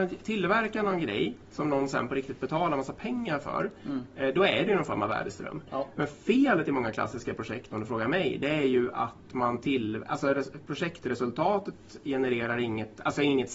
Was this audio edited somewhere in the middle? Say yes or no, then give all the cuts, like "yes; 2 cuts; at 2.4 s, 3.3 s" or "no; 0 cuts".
no; 0 cuts